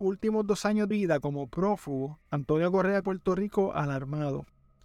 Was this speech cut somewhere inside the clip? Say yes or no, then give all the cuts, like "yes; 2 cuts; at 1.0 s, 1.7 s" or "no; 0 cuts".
yes; 3 cuts; at 0.9 s, 2.2 s, 3.0 s